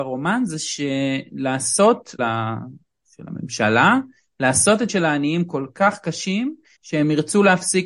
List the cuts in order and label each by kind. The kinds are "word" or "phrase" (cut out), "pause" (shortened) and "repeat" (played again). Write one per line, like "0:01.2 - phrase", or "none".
0:02.2 - phrase
0:04.9 - word
0:06.7 - pause

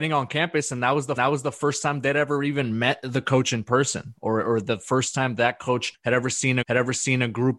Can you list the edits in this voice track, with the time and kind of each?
0:01.2 - repeat
0:06.6 - repeat

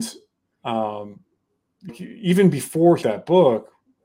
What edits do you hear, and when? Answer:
0:01.9 - word
0:03.0 - word

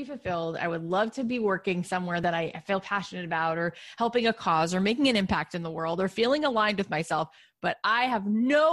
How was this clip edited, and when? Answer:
none

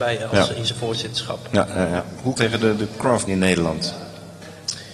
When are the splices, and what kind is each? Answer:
0:02.4 - phrase
0:03.3 - word

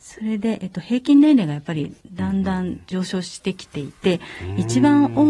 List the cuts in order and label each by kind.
0:02.0 - pause

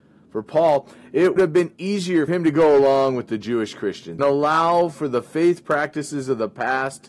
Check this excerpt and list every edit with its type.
0:01.4 - word
0:02.3 - word
0:04.2 - word

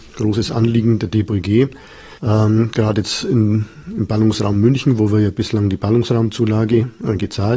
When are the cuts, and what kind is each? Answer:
0:02.2 - pause

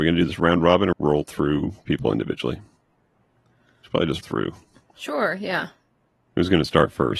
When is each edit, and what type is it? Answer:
0:00.9 - phrase
0:01.9 - word
0:04.2 - word

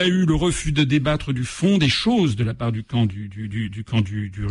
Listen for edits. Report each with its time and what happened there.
none

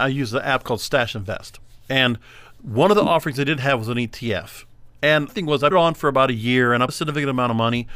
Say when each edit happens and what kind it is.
0:05.3 - word
0:05.7 - word
0:06.9 - word

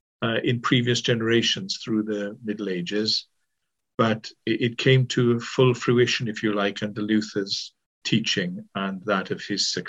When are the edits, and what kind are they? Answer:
0:08.0 - word

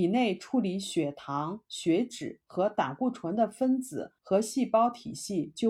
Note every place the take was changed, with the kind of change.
0:04.2 - pause

